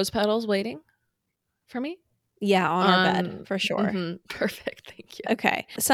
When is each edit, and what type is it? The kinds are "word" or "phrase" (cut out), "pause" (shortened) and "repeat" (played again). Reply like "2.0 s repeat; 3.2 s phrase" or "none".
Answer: none